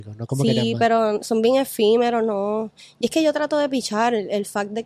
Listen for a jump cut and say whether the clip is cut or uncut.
uncut